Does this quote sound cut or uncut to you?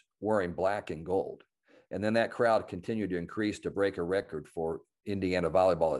uncut